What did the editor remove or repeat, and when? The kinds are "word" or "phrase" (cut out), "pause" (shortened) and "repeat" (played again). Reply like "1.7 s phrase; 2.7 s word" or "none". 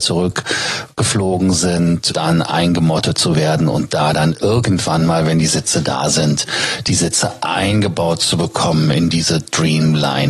2.1 s word